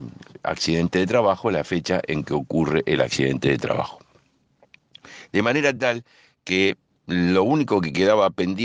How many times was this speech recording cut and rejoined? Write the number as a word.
zero